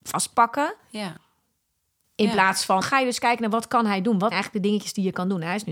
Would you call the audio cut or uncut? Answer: cut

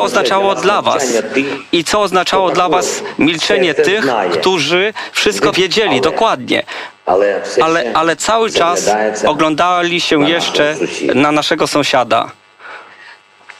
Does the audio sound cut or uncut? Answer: cut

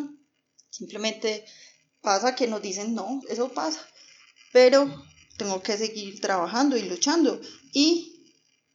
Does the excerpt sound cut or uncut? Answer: cut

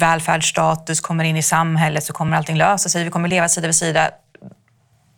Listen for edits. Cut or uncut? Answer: uncut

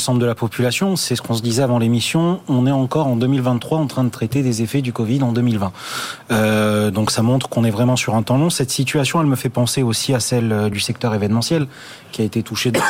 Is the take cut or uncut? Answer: uncut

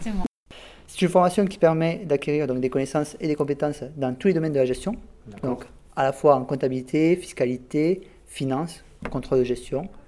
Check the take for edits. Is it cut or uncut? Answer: uncut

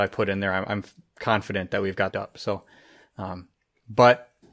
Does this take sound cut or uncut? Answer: cut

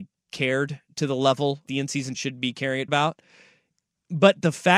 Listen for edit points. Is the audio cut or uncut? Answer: cut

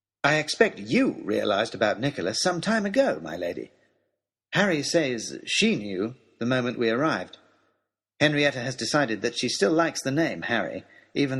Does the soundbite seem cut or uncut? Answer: uncut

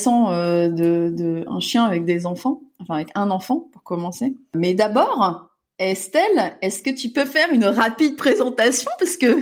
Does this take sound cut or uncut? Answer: uncut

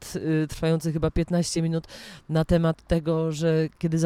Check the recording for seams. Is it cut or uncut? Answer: uncut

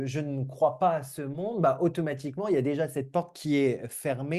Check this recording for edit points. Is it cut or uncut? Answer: uncut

